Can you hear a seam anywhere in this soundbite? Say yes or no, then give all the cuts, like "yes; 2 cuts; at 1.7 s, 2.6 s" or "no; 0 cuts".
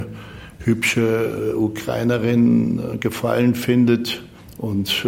no; 0 cuts